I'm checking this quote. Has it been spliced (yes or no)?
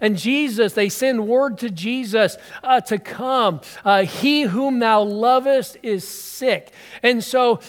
no